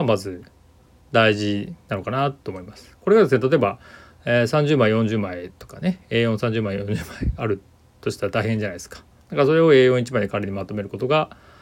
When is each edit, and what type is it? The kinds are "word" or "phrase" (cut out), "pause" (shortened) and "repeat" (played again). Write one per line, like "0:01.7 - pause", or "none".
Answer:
none

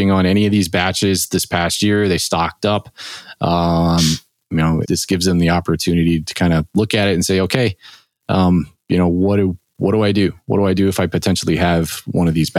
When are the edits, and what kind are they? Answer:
0:04.8 - word

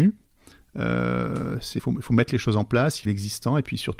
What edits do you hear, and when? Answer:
0:01.8 - word
0:03.1 - phrase

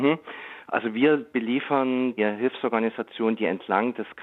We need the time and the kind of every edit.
0:02.2 - word

